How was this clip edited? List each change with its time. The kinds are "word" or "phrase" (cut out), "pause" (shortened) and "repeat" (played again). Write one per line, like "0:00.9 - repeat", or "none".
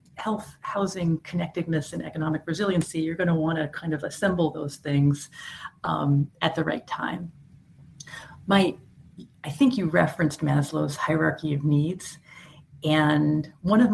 none